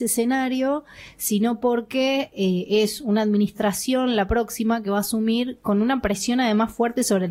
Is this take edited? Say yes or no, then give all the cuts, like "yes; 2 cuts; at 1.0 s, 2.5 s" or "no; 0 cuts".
no; 0 cuts